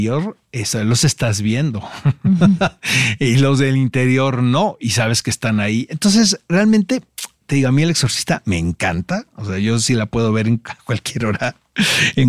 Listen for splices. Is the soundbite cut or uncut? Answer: uncut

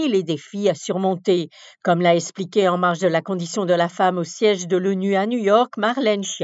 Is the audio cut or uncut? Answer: uncut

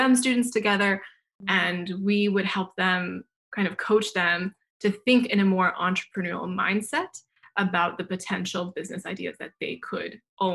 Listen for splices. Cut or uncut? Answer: uncut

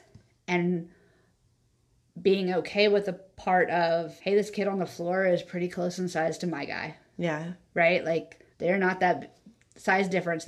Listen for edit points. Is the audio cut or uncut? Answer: cut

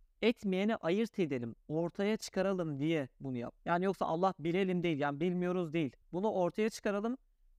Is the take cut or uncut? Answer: cut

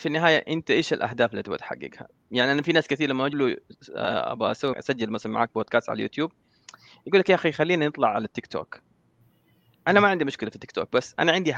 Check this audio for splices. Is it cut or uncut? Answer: cut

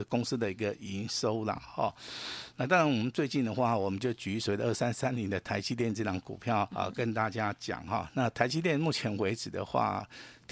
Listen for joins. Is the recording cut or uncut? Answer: cut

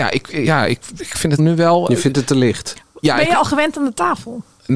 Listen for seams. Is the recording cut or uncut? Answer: cut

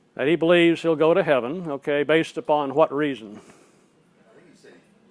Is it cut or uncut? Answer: uncut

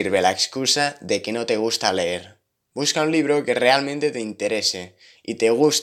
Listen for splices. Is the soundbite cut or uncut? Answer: uncut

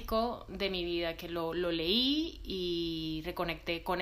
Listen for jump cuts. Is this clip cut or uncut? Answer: uncut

